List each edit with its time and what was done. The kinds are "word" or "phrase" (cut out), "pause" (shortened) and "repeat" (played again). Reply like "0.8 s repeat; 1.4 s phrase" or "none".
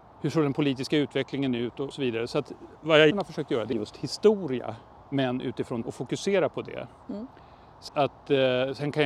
1.9 s phrase; 3.1 s word; 3.7 s phrase; 4.9 s pause; 5.8 s word; 7.9 s word